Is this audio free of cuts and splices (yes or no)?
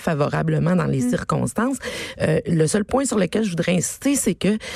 yes